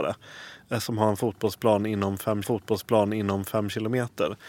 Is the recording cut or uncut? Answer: cut